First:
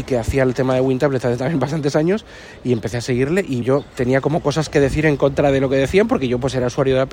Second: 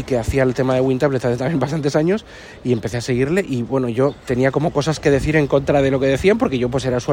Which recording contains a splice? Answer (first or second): first